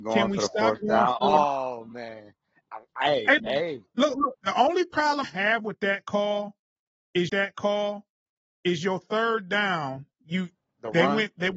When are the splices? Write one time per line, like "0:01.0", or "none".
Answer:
0:03.4
0:05.2
0:07.3
0:10.1